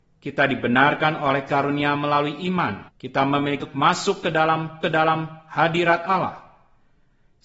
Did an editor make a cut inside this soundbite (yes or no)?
yes